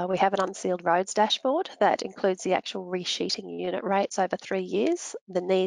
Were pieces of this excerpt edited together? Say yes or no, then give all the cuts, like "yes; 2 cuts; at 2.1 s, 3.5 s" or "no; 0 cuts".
no; 0 cuts